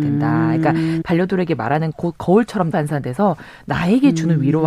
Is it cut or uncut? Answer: cut